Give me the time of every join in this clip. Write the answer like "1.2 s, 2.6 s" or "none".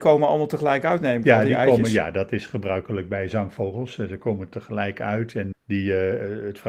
5.5 s